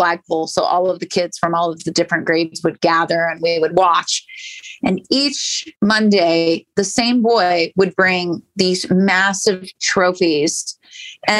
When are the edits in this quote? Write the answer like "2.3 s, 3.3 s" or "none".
5.8 s